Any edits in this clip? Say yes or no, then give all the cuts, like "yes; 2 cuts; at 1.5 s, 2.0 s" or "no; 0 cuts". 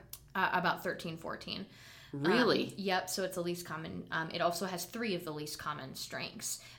no; 0 cuts